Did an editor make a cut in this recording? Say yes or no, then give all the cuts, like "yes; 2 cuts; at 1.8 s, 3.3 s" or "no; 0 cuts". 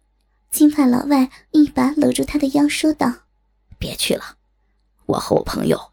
yes; 1 cut; at 3.3 s